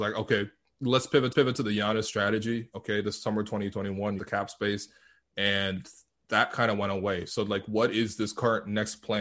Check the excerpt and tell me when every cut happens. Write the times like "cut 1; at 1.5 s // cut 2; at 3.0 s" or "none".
cut 1; at 1.3 s // cut 2; at 4.2 s